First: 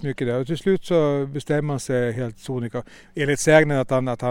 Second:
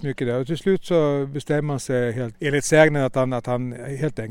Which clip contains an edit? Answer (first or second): second